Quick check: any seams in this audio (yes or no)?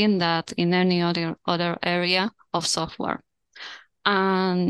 no